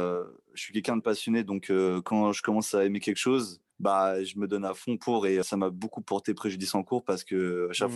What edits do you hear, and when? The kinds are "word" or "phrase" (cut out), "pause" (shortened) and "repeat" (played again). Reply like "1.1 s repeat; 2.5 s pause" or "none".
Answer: 1.0 s word; 3.7 s pause; 5.4 s word